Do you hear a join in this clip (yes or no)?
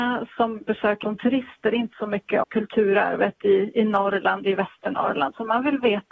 yes